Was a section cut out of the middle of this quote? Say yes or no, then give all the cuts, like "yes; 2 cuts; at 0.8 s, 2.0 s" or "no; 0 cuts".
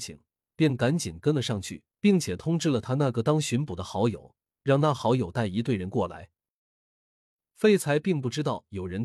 yes; 1 cut; at 1.9 s